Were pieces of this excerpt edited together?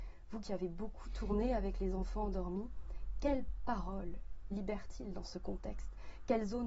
no; 0 cuts

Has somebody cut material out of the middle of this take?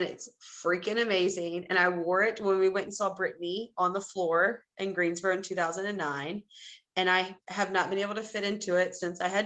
yes; 1 cut; at 7.4 s

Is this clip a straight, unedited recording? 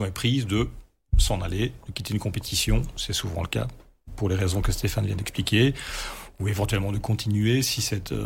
yes; 0 cuts

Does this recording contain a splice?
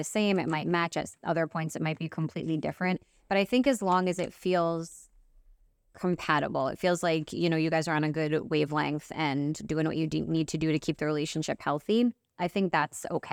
no; 0 cuts

